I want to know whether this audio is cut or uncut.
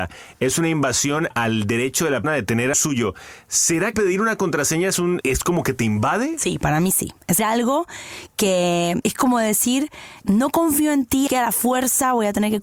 cut